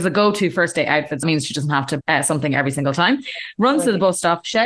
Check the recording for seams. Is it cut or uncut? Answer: cut